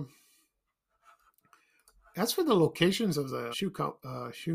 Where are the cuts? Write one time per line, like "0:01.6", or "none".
0:03.5